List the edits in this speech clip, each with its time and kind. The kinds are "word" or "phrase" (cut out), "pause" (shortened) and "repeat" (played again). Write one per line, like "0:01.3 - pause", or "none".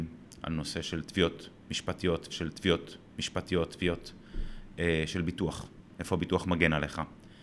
0:02.3 - repeat